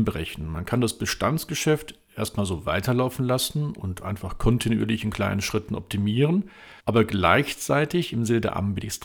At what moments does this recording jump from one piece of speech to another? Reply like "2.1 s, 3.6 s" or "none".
6.8 s